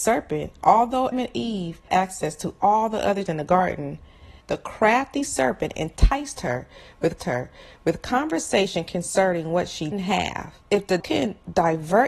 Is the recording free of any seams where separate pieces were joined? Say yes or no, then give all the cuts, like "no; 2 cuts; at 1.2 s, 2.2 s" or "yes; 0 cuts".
no; 8 cuts; at 1.1 s, 1.9 s, 3.3 s, 4.4 s, 7.2 s, 9.9 s, 10.6 s, 11.0 s